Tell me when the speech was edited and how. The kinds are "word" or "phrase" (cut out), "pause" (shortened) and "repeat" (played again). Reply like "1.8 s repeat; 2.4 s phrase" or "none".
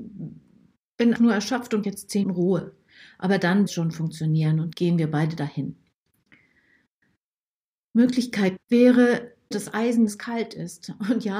1.2 s word; 1.8 s word; 2.2 s word; 3.7 s word; 4.7 s word; 8.6 s word; 9.5 s word; 10.1 s word